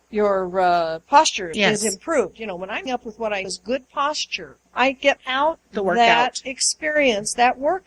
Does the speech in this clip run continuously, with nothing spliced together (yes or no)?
no